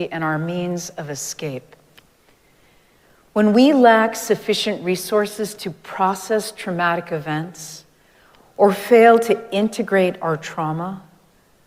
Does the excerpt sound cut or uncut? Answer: uncut